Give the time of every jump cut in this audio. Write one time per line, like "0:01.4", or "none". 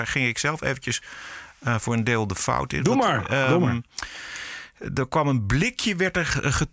none